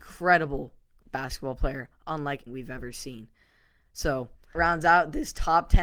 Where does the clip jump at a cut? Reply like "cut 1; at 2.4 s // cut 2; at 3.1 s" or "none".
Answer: cut 1; at 2.5 s // cut 2; at 4.5 s

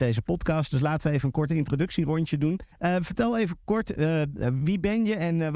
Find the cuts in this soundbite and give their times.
cut 1; at 2.7 s

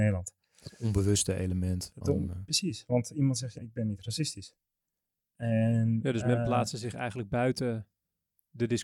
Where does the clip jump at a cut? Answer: cut 1; at 3.6 s

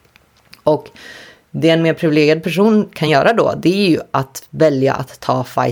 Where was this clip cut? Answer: none

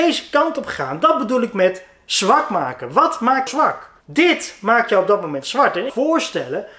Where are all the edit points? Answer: cut 1; at 3.5 s // cut 2; at 4.0 s // cut 3; at 5.9 s

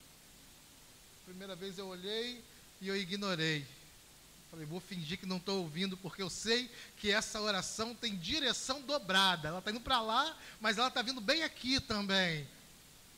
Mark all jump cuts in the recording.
cut 1; at 4.4 s

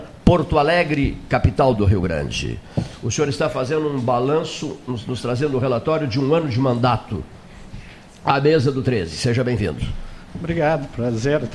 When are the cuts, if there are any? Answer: cut 1; at 8.1 s

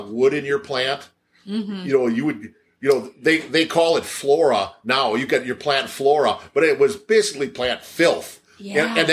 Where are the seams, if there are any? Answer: none

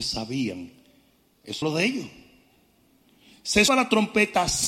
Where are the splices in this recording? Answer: cut 1; at 1.6 s // cut 2; at 3.7 s

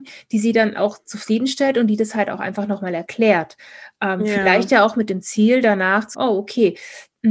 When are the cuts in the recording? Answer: cut 1; at 6.1 s

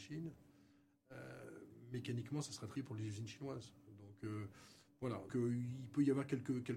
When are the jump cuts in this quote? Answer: cut 1; at 2.8 s // cut 2; at 5.3 s

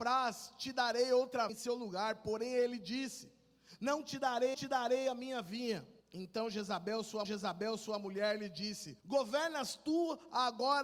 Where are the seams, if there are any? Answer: cut 1; at 1.5 s // cut 2; at 4.5 s // cut 3; at 6.0 s // cut 4; at 7.2 s // cut 5; at 9.0 s

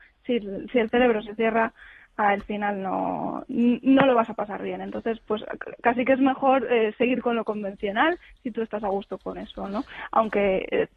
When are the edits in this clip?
none

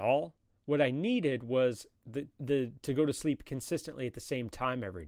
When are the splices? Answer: cut 1; at 2.3 s

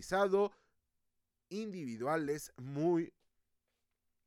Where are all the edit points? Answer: none

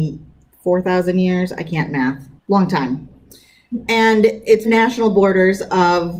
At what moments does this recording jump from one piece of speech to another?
cut 1; at 2.4 s // cut 2; at 4.6 s

